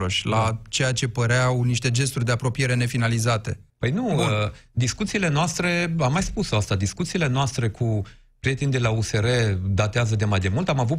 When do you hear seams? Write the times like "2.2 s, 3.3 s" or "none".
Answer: 3.7 s

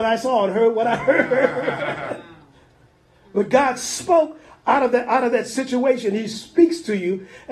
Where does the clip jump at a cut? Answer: none

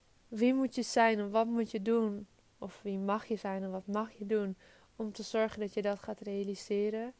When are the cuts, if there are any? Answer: none

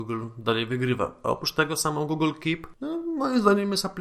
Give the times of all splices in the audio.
2.8 s

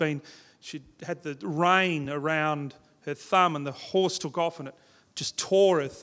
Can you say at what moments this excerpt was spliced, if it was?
none

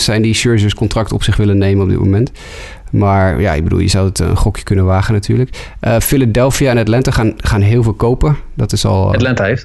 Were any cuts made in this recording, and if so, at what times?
none

